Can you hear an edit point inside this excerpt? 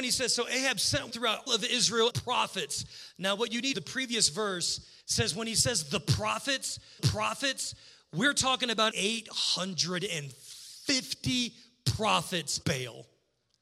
yes; 8 cuts; at 1.1 s, 1.5 s, 2.1 s, 3.7 s, 5.0 s, 7.0 s, 8.9 s, 12.6 s

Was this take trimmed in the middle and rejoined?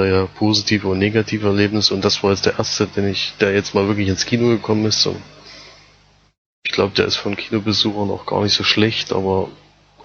no; 0 cuts

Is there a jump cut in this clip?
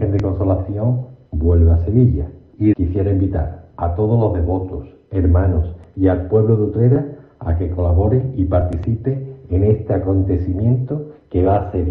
no; 0 cuts

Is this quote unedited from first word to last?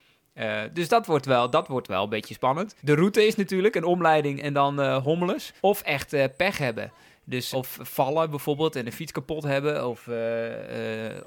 no; 3 cuts; at 2.8 s, 5.6 s, 7.5 s

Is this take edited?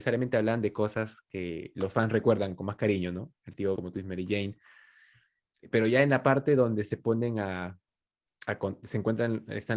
yes; 1 cut; at 3.8 s

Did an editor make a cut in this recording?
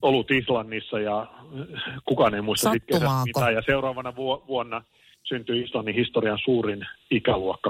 no; 0 cuts

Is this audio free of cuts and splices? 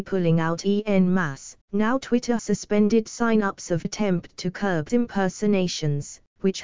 no; 4 cuts; at 1.6 s, 2.4 s, 3.8 s, 4.9 s

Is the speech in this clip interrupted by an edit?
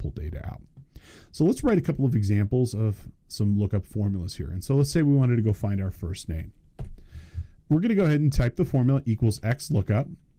no; 0 cuts

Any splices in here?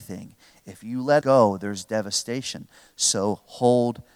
yes; 1 cut; at 1.2 s

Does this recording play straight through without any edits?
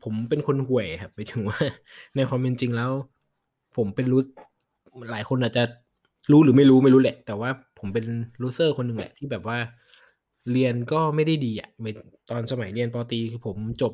yes; 0 cuts

